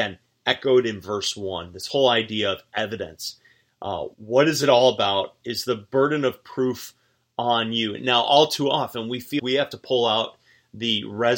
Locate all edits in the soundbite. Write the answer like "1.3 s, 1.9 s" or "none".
4.1 s, 9.4 s